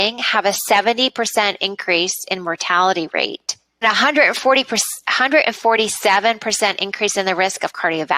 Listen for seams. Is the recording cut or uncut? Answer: cut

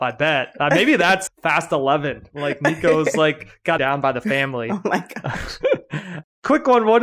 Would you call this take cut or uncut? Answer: cut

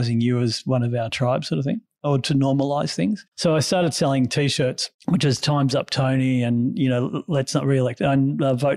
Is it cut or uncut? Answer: uncut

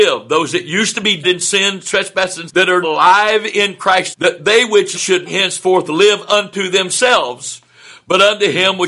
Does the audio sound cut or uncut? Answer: cut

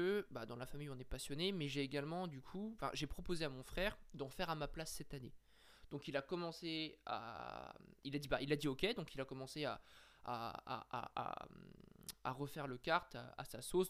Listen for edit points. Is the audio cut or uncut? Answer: uncut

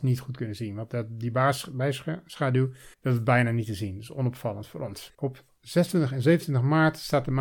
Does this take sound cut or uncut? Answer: cut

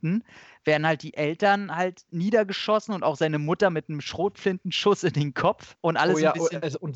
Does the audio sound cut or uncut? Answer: uncut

